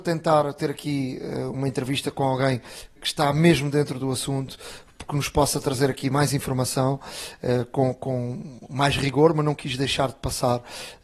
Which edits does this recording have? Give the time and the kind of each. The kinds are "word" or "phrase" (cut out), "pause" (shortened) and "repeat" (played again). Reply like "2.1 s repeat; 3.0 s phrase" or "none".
3.0 s word